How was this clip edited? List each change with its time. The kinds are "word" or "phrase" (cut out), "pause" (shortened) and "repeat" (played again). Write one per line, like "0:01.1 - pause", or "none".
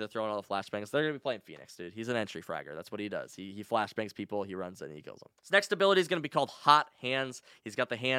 0:05.4 - pause

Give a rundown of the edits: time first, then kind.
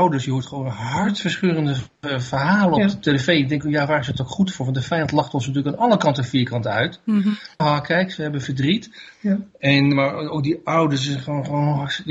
0:07.6 - word
0:09.9 - word

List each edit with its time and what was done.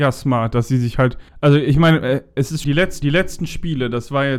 0:01.3 - pause
0:02.6 - word
0:03.0 - repeat

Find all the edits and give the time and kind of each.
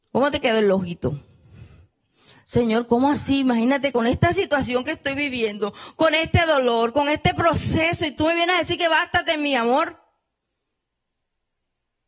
none

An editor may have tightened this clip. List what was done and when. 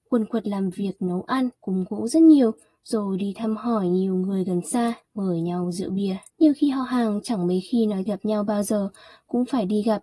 0:01.5 - pause
0:05.0 - pause
0:06.3 - pause
0:08.1 - word

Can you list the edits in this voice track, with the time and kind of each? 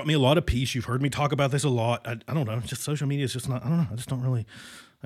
none

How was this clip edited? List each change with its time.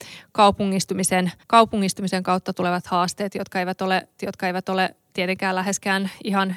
0:01.4 - pause
0:04.2 - repeat

